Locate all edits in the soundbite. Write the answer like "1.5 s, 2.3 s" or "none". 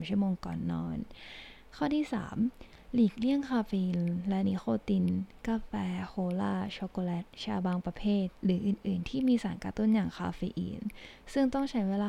8.4 s